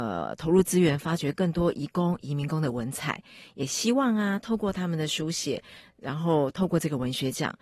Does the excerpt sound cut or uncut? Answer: uncut